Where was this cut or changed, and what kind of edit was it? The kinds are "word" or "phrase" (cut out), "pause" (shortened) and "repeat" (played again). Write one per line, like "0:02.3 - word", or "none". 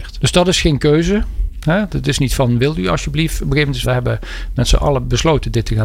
0:03.8 - word